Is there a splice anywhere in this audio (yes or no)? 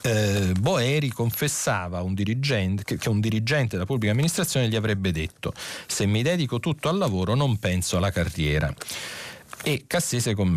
no